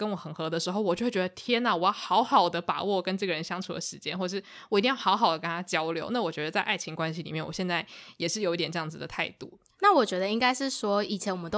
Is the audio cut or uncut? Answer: uncut